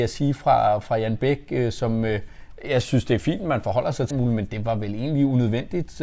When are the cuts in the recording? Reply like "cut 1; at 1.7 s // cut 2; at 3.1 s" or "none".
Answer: cut 1; at 4.1 s